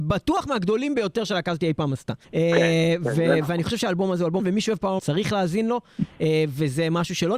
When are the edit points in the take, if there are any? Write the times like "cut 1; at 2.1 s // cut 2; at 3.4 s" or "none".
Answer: cut 1; at 2.2 s // cut 2; at 4.4 s // cut 3; at 5.0 s

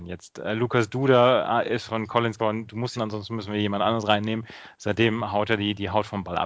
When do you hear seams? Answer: cut 1; at 1.9 s // cut 2; at 2.4 s // cut 3; at 2.9 s

